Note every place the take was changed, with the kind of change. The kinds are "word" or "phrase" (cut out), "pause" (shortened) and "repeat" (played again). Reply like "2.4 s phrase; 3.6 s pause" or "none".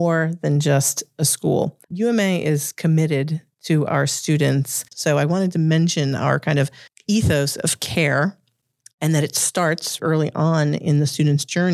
1.8 s pause; 4.9 s pause; 6.9 s pause; 8.8 s pause; 10.0 s word